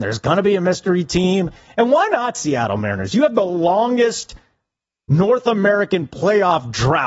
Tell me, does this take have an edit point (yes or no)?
no